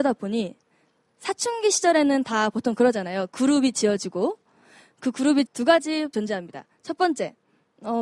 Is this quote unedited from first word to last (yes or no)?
no